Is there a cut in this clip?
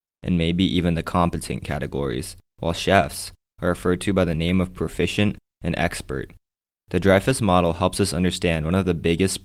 no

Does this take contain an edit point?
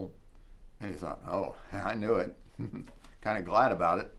no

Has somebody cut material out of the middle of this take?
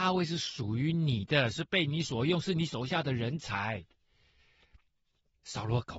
no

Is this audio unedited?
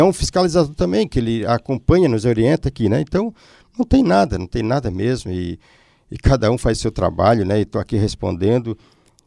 yes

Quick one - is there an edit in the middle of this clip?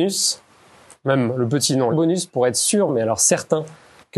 yes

